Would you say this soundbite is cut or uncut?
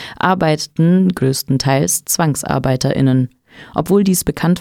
uncut